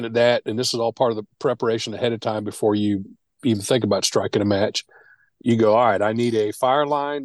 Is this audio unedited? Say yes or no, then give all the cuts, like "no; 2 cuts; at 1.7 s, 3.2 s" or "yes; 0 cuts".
yes; 0 cuts